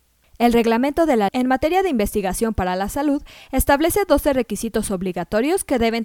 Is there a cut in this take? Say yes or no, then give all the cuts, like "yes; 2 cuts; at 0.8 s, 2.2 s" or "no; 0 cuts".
yes; 1 cut; at 1.3 s